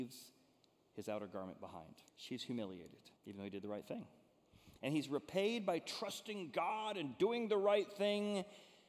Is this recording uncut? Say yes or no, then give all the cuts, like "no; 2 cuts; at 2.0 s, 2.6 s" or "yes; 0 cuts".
no; 2 cuts; at 2.1 s, 3.2 s